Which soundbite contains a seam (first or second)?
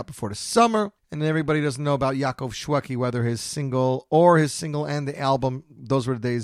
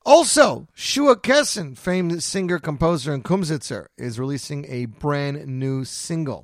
first